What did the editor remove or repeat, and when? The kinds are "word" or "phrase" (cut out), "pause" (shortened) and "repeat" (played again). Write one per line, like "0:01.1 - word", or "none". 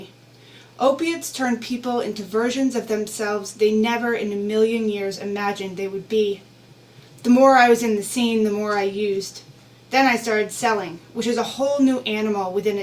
none

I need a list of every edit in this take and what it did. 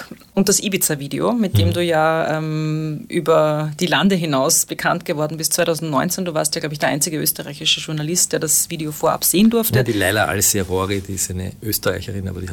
none

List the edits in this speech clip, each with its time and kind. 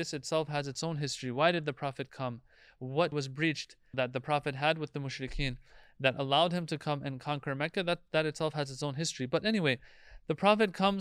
0:03.1 - word
0:03.9 - word

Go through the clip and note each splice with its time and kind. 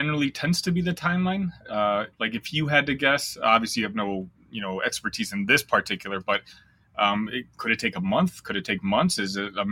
0:04.4 - pause

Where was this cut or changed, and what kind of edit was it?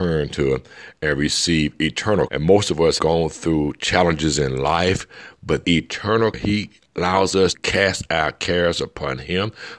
0:02.3 - word
0:03.0 - word
0:05.6 - word
0:06.3 - word
0:07.5 - word

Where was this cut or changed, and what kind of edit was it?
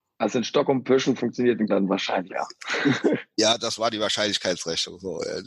0:01.2 - word
0:01.7 - word
0:02.3 - word

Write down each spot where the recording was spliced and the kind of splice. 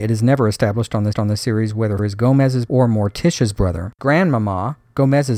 0:01.1 - repeat
0:02.0 - word
0:02.7 - word
0:03.9 - pause

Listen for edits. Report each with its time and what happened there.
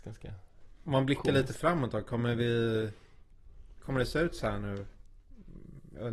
none

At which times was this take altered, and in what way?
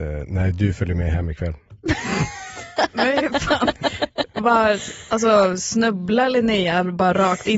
none

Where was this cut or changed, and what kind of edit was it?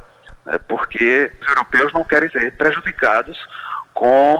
0:01.4 - phrase
0:02.3 - word

